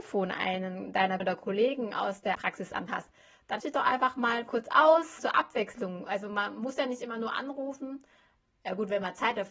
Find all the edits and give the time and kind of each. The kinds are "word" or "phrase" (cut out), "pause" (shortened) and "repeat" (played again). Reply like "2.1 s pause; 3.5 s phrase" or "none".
1.2 s word; 2.3 s word; 2.9 s word; 3.6 s word; 5.2 s word